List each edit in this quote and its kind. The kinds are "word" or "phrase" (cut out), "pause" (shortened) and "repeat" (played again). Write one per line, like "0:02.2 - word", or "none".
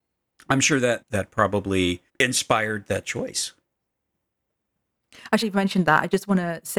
0:01.0 - word
0:02.1 - pause
0:05.4 - phrase